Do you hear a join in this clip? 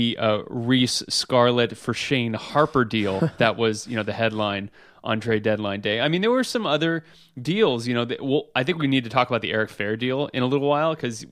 no; 0 cuts

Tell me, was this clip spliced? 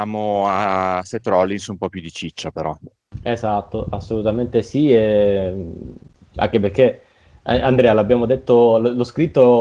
no; 0 cuts

